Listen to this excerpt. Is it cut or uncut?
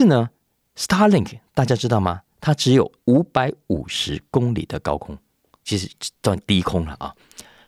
cut